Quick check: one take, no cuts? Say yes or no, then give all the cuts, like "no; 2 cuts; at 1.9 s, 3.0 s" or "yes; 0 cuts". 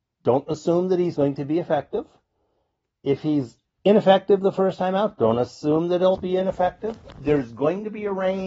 no; 2 cuts; at 1.1 s, 6.1 s